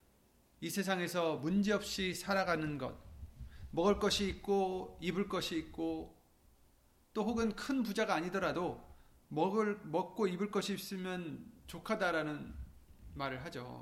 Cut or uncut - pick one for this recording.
uncut